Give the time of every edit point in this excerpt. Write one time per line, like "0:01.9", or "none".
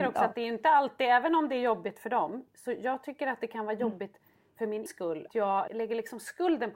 0:04.9
0:05.3
0:05.7